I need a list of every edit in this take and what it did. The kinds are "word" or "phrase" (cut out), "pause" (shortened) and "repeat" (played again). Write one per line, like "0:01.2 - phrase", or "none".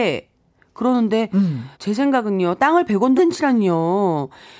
0:01.7 - pause
0:02.9 - word
0:03.2 - phrase